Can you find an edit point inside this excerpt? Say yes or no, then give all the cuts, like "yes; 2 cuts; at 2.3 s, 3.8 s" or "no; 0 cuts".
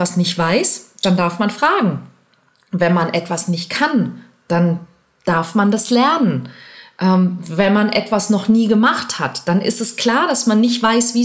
no; 0 cuts